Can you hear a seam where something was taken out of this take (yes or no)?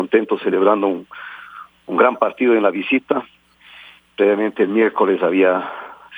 no